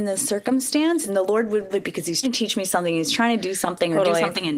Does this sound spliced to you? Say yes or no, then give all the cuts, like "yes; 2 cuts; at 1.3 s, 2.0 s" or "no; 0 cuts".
yes; 3 cuts; at 1.1 s, 1.7 s, 2.2 s